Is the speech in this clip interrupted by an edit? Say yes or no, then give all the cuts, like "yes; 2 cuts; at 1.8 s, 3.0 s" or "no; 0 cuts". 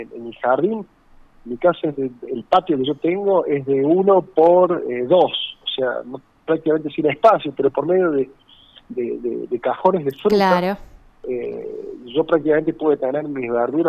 no; 0 cuts